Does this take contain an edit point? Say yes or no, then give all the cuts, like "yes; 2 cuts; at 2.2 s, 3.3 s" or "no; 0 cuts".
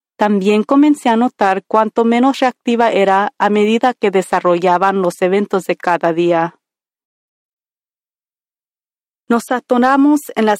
no; 0 cuts